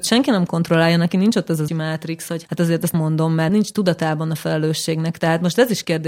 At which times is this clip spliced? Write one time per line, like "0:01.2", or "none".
0:01.7
0:02.4
0:02.9
0:03.5